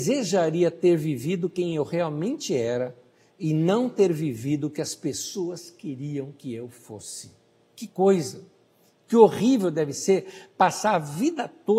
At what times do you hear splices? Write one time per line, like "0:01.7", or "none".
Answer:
none